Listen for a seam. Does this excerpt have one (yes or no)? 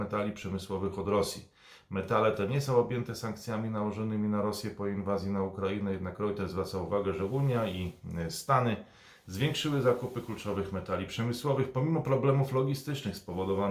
no